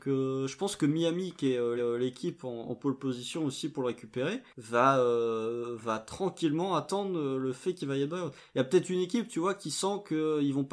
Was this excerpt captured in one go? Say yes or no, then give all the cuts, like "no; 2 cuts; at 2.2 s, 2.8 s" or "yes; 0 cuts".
no; 2 cuts; at 1.8 s, 4.5 s